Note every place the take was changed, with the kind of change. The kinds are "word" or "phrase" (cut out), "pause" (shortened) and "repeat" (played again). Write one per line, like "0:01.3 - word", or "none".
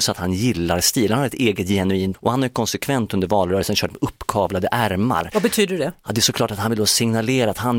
0:02.1 - word